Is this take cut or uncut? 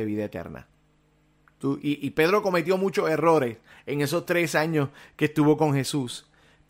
uncut